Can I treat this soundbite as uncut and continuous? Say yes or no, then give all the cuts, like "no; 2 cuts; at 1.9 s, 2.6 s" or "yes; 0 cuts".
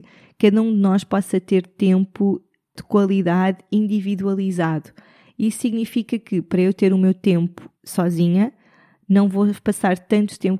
no; 1 cut; at 7.7 s